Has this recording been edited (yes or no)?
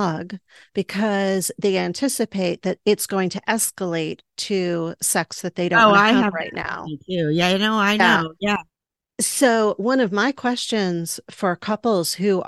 no